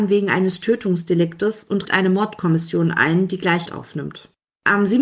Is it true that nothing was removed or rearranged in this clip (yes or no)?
no